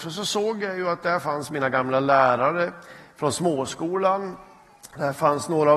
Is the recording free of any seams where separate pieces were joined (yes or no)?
yes